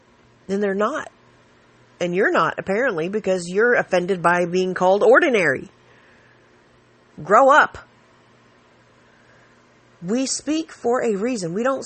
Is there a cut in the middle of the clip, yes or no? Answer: no